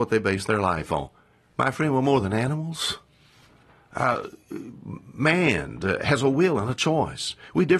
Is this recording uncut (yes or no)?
yes